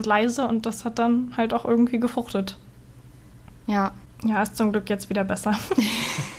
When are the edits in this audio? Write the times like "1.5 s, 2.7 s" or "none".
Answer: 4.1 s

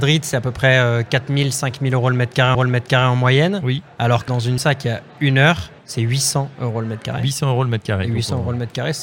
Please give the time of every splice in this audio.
2.5 s, 4.3 s, 4.6 s, 5.8 s

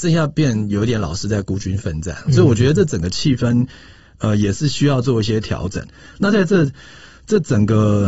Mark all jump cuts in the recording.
none

